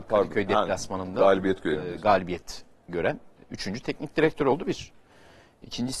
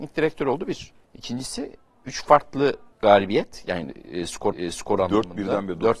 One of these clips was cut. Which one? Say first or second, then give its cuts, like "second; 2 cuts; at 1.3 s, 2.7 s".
second; 3 cuts; at 1.0 s, 2.9 s, 4.5 s